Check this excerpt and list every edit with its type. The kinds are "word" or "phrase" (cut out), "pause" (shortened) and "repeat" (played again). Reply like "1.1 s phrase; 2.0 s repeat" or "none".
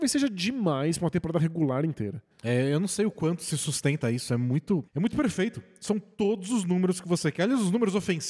2.3 s pause; 4.9 s pause

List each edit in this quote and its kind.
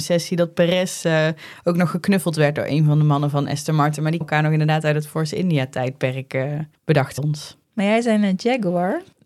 4.2 s word; 7.2 s word; 7.6 s pause

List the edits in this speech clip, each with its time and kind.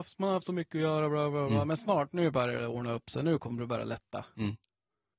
none

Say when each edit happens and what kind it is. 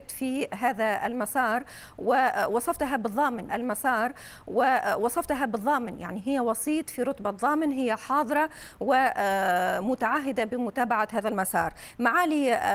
3.5 s repeat

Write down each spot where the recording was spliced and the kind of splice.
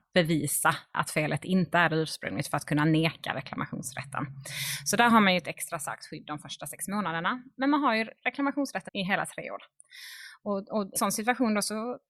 0.9 s word; 8.9 s word; 11.0 s word

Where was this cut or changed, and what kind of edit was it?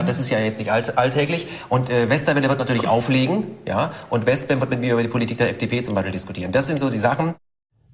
none

